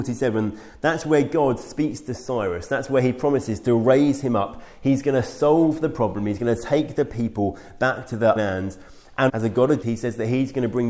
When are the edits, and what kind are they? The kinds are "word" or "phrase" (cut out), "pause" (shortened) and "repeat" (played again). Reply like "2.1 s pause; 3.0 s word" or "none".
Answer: 8.4 s word; 9.3 s word; 9.8 s word